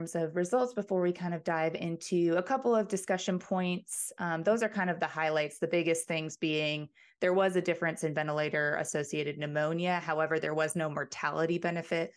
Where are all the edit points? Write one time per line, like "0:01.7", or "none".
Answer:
none